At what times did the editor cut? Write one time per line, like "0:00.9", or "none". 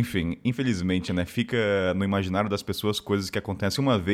none